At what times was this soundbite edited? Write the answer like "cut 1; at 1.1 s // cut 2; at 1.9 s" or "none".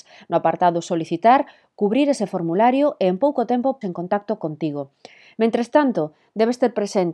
cut 1; at 3.8 s